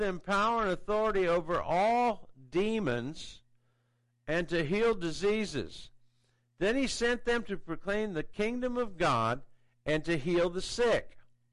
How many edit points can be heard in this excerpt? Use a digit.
0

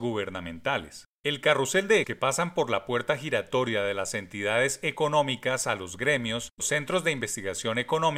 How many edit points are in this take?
2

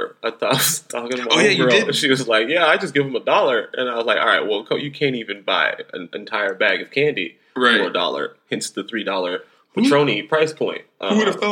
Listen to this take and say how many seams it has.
0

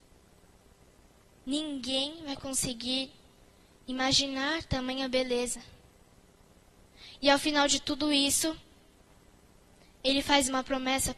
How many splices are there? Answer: 0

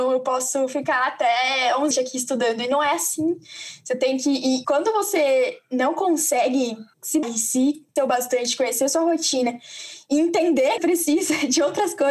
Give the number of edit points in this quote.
5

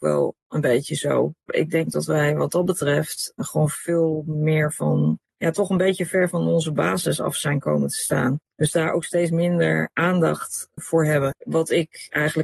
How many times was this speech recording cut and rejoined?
0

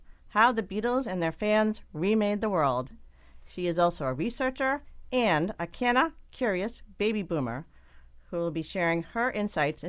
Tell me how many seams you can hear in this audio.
0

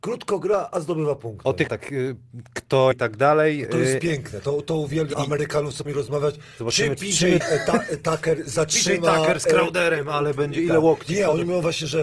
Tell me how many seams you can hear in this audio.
5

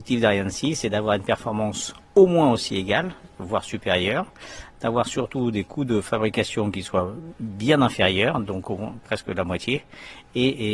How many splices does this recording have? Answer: 1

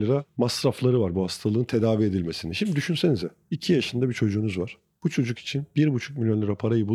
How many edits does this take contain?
0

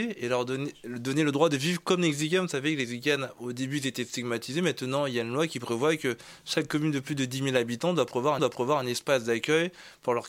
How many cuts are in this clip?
1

